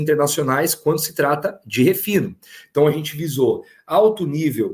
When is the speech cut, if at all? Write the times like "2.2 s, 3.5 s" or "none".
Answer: none